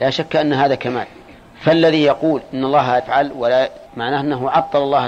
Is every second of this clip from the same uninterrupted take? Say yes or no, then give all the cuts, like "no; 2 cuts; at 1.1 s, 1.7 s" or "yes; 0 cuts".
no; 3 cuts; at 1.4 s, 3.0 s, 3.9 s